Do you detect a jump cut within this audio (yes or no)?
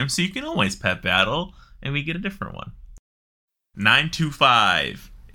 no